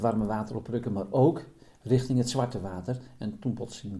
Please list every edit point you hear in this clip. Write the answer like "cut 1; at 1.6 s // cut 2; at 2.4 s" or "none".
none